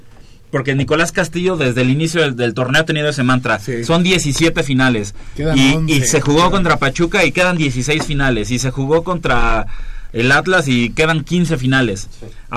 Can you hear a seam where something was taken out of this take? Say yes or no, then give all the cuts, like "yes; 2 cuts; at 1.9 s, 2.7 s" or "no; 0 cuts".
no; 0 cuts